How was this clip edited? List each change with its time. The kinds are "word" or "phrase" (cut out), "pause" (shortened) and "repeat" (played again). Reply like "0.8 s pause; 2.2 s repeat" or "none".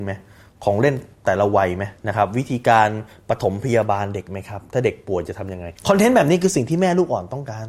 2.0 s pause; 5.8 s pause